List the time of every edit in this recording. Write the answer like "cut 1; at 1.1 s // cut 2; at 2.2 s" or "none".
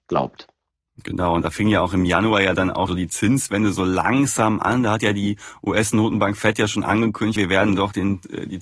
cut 1; at 2.9 s // cut 2; at 7.4 s